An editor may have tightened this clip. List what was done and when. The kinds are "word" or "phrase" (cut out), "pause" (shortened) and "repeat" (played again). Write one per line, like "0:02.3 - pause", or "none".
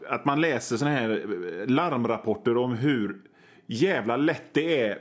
none